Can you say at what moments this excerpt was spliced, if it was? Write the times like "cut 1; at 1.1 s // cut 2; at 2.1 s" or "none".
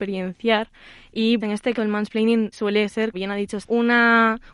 cut 1; at 1.4 s // cut 2; at 1.7 s // cut 3; at 2.5 s // cut 4; at 3.1 s // cut 5; at 3.6 s